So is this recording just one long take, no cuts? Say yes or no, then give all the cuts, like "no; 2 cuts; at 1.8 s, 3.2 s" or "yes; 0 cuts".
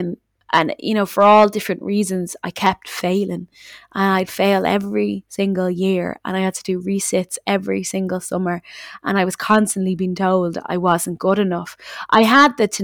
yes; 0 cuts